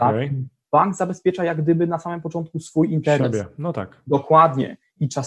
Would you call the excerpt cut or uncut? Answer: uncut